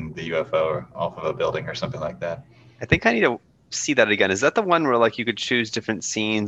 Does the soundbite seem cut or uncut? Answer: uncut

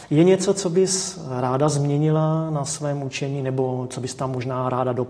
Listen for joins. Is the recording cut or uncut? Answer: uncut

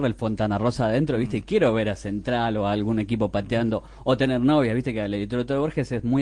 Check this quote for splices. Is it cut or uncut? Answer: uncut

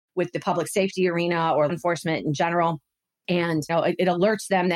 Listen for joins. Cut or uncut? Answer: cut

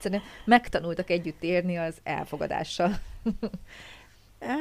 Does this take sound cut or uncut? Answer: uncut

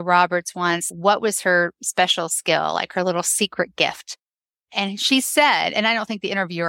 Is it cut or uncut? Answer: uncut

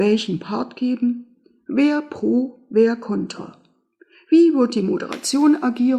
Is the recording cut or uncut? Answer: uncut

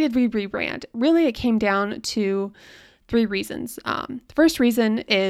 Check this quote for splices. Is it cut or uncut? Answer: uncut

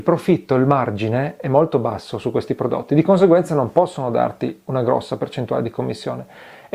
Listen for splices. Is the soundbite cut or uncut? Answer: uncut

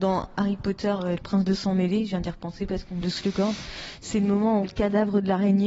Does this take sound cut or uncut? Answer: cut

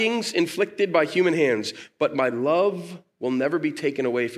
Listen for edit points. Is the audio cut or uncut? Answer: uncut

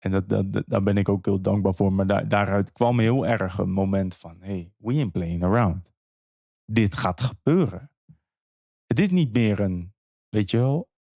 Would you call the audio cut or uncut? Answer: uncut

